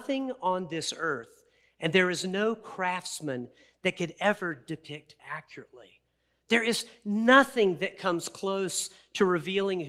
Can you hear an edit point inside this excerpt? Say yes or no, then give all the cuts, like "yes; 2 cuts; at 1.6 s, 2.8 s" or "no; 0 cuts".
yes; 1 cut; at 5.2 s